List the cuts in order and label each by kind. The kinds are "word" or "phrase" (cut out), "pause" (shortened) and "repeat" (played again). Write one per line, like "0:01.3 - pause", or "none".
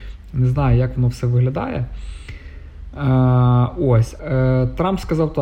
0:04.2 - word